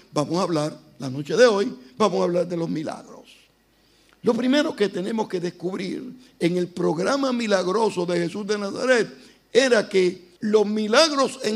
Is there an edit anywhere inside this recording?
yes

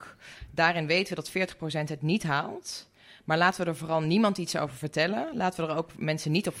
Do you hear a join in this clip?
no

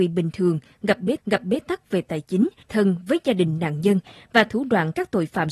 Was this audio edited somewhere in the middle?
yes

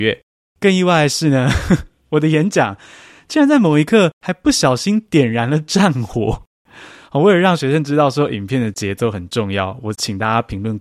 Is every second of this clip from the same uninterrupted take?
yes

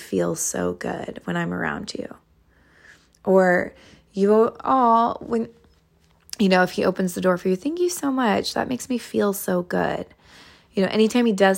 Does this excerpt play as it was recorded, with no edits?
yes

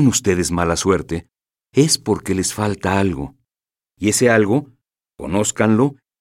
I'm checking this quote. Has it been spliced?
no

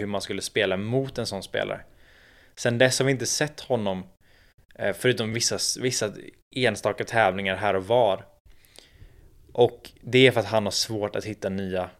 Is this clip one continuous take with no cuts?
yes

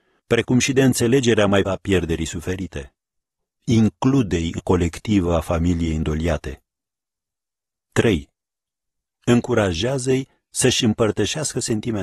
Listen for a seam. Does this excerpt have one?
yes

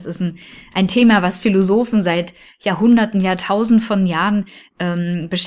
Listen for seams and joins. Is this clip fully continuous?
yes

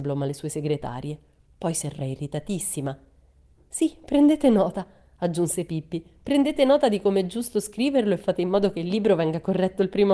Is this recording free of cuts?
no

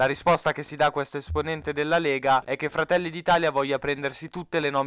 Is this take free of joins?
yes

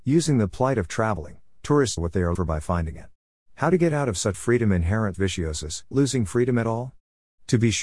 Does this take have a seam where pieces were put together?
yes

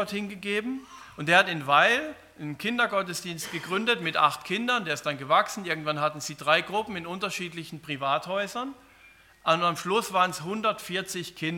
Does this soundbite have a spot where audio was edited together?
no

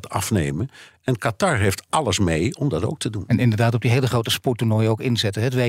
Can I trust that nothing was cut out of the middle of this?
yes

